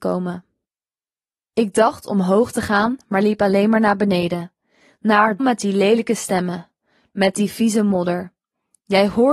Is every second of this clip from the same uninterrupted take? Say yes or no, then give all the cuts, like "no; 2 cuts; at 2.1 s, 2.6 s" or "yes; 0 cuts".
no; 1 cut; at 5.4 s